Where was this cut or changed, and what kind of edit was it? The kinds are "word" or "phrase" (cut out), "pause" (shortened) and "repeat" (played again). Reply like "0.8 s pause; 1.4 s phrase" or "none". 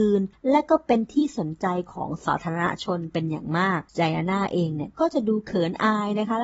3.9 s pause